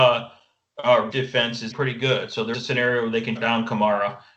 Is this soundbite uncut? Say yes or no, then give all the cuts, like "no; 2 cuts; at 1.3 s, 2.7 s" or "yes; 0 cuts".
no; 4 cuts; at 1.1 s, 1.7 s, 2.5 s, 3.4 s